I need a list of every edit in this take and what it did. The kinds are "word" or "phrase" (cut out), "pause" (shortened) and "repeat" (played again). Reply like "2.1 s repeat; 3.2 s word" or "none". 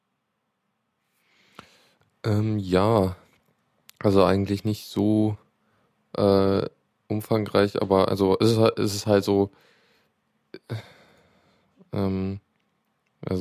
none